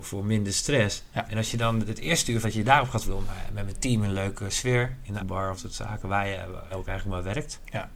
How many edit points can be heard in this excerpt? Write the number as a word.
five